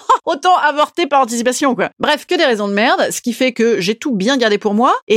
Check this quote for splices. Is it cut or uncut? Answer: uncut